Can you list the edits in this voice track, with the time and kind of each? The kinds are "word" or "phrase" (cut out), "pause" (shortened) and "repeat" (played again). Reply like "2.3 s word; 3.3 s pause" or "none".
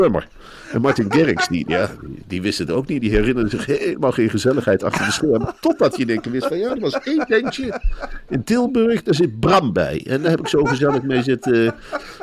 none